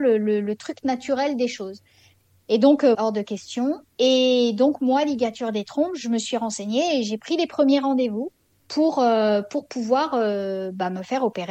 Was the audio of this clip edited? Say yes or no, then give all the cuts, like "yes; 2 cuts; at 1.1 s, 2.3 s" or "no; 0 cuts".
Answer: yes; 2 cuts; at 2.9 s, 3.9 s